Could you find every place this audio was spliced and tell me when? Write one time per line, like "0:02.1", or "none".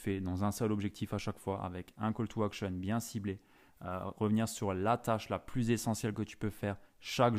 none